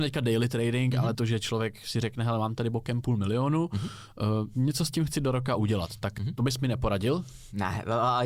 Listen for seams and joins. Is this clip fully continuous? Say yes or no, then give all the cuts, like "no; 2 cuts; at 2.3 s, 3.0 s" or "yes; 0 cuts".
no; 1 cut; at 1.1 s